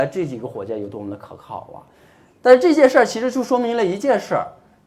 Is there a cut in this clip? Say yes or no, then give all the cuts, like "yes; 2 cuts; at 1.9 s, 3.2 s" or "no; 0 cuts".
no; 0 cuts